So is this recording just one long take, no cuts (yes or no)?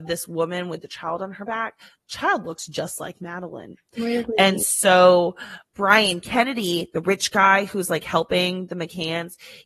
yes